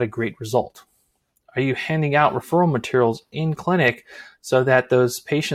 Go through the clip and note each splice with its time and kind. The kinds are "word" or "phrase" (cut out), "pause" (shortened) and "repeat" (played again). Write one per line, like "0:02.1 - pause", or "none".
none